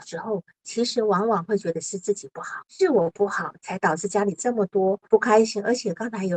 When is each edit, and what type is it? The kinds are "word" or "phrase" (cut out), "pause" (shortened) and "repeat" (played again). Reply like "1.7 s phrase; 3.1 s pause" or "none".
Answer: 2.7 s pause; 5.0 s pause